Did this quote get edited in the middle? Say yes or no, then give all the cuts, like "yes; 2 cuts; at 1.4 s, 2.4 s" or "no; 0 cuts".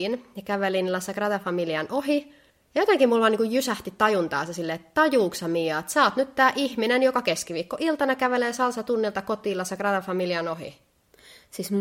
no; 0 cuts